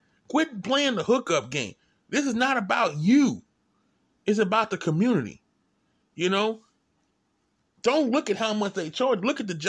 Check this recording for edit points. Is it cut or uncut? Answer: uncut